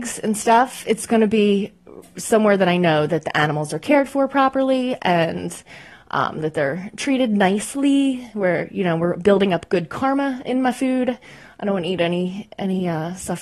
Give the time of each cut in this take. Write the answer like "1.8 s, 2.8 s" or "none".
none